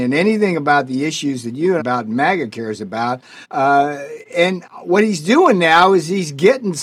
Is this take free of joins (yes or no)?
no